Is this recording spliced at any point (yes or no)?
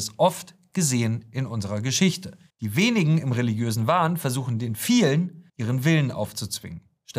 yes